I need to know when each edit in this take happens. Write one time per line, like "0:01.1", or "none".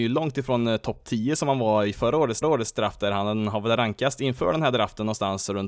0:02.4